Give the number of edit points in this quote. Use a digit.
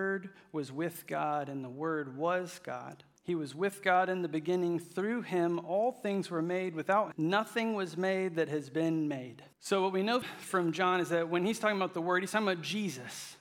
4